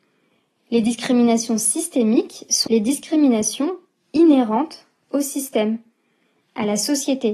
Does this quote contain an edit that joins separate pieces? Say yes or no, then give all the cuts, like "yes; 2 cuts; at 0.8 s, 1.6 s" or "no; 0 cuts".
yes; 1 cut; at 2.7 s